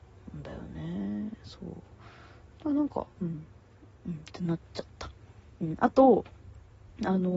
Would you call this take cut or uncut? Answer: uncut